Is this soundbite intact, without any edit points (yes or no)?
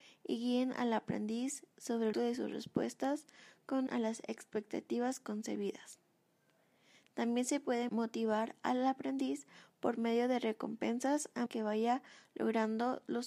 no